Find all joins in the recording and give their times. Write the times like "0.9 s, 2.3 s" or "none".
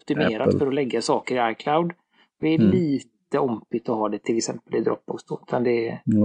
none

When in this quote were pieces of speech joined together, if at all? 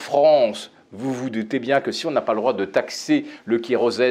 none

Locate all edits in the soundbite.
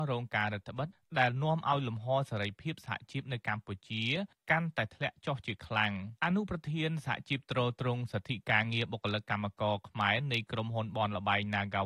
6.2 s

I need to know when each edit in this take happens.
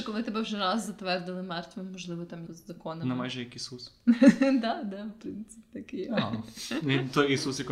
2.5 s

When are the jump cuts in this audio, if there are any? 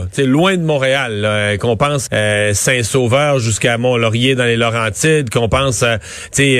2.1 s

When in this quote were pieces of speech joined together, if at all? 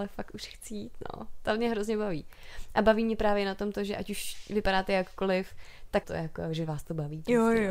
6.0 s

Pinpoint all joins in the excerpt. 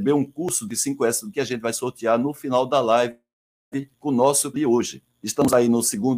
1.3 s, 3.9 s, 4.5 s, 5.1 s

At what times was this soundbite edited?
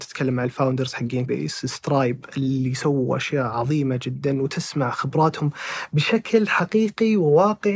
1.3 s

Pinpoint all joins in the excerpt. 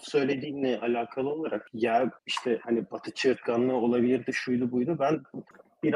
none

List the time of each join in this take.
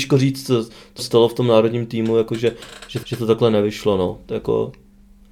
1.0 s, 3.0 s

